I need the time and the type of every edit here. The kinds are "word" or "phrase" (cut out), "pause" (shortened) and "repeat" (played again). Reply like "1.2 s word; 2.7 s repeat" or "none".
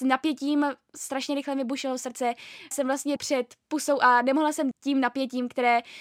2.7 s word; 3.2 s word; 4.7 s word